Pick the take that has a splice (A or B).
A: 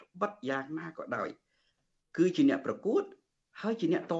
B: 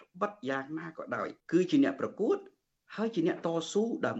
B